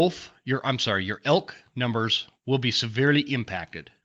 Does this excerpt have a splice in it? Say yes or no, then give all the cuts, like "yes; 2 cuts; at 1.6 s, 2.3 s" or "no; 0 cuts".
no; 0 cuts